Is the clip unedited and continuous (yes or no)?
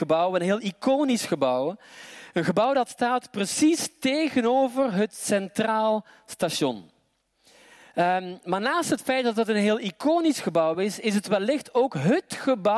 yes